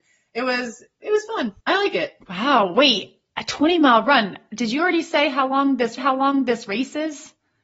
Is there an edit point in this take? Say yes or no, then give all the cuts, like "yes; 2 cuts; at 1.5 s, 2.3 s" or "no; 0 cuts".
yes; 3 cuts; at 1.6 s, 2.2 s, 6.0 s